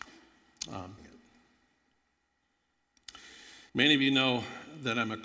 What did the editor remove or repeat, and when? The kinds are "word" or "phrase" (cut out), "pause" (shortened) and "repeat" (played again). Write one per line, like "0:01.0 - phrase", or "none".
0:01.0 - word
0:03.7 - pause